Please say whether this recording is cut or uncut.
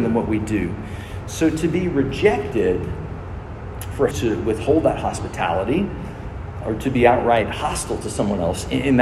cut